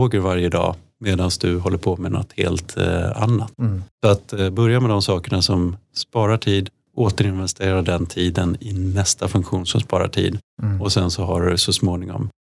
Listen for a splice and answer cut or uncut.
cut